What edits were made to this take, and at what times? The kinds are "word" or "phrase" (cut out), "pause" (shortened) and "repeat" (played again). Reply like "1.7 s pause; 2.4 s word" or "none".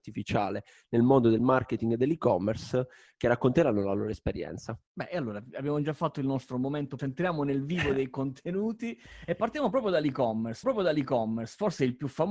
4.9 s pause; 7.0 s phrase; 10.6 s repeat